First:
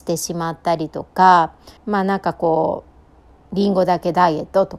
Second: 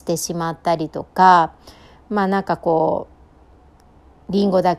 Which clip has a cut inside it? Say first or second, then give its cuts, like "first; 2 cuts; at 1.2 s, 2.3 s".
first; 2 cuts; at 1.8 s, 3.3 s